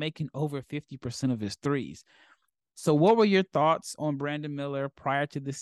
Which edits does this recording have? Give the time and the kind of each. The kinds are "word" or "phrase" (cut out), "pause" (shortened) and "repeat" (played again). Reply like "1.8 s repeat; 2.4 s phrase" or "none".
none